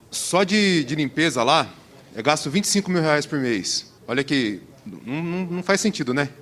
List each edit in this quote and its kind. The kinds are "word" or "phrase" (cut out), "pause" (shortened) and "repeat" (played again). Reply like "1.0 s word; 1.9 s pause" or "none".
4.0 s pause